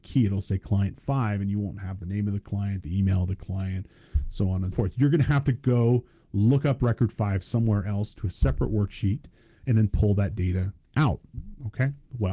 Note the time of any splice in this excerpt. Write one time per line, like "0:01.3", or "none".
0:04.7